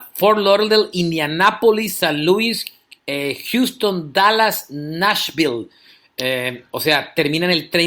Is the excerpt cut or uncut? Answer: uncut